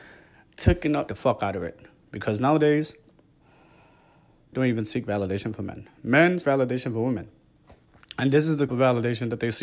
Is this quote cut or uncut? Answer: cut